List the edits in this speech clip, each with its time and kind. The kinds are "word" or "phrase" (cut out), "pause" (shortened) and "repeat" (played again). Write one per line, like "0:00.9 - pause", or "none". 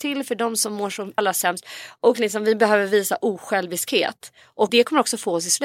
0:01.2 - word
0:04.7 - word